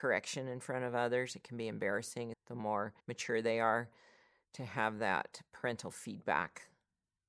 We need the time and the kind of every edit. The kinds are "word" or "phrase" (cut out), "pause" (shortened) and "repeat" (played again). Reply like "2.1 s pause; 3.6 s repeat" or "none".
2.3 s word; 3.0 s pause

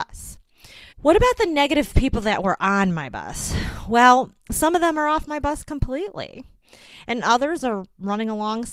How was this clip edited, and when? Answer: 0.9 s pause; 4.4 s pause

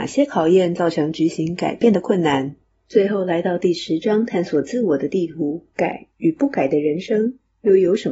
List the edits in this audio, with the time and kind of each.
2.7 s pause; 5.7 s pause

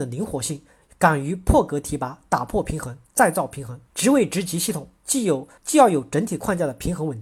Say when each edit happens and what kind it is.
3.9 s pause; 5.6 s pause

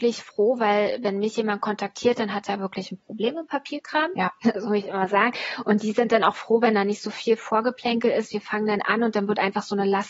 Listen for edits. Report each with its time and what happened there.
none

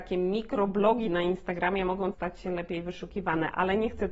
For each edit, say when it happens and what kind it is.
2.1 s word

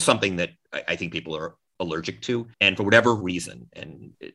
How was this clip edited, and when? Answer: 2.5 s pause

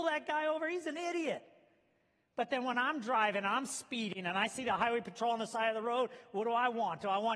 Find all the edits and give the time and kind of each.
none

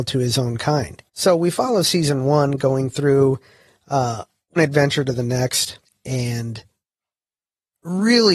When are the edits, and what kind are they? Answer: 1.1 s pause; 4.6 s word; 5.8 s pause

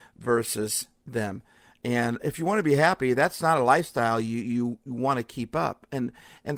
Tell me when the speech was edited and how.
2.2 s word; 3.4 s word

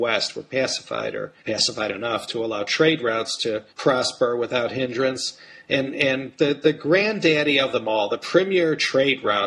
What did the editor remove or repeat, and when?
1.4 s pause; 3.7 s pause

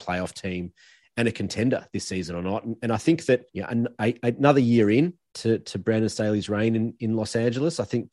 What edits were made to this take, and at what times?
3.5 s pause

